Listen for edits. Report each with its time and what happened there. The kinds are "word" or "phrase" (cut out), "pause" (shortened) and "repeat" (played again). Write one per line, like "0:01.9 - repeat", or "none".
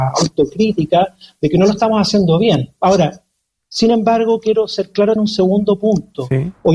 0:05.2 - word